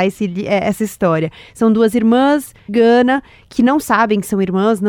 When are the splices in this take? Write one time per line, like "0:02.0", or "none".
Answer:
0:02.7